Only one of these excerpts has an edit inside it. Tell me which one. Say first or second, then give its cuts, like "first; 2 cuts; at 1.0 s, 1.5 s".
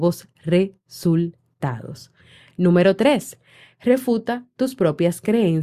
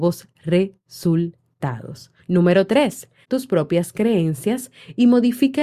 second; 2 cuts; at 2.2 s, 3.2 s